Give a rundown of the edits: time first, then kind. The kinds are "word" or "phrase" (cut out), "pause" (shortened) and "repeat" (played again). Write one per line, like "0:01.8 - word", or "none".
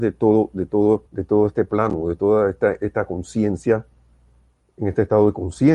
0:01.1 - pause

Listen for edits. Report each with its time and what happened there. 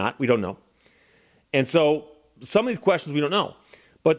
none

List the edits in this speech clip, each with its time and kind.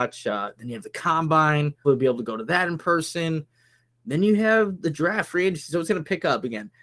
0:01.8 - word

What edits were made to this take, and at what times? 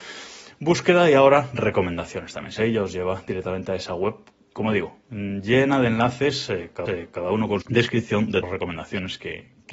0:02.6 - phrase
0:06.9 - repeat
0:07.6 - word
0:08.4 - word

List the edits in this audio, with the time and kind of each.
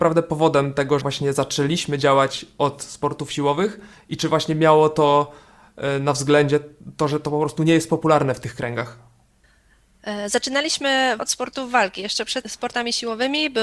0:01.0 - word
0:11.2 - word
0:12.4 - word

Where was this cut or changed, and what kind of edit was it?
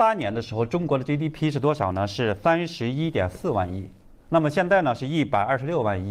none

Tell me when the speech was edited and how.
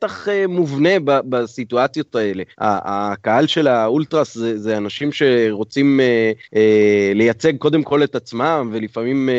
0:02.5 - pause
0:06.4 - pause

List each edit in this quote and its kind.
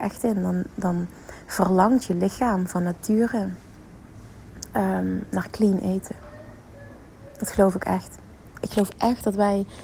none

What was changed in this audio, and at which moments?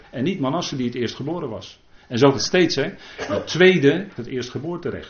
0:02.3 - word
0:04.2 - word

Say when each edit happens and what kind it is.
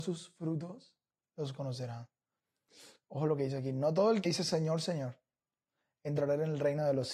0:04.2 - word

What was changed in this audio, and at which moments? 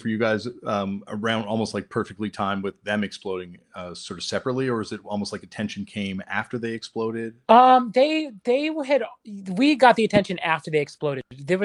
0:07.4 - pause

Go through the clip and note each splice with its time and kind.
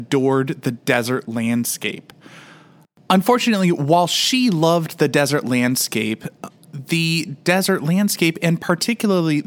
none

